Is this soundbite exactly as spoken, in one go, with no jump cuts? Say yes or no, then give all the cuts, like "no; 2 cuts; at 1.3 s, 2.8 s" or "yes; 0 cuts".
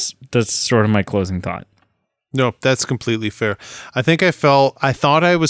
yes; 0 cuts